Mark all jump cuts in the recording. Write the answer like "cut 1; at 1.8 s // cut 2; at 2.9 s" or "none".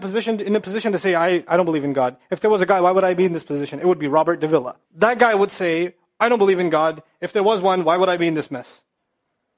cut 1; at 4.8 s